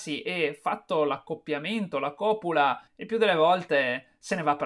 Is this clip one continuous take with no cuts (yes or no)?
no